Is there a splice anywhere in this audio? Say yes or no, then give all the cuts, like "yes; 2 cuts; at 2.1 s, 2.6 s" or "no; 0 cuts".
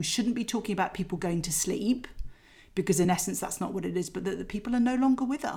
no; 0 cuts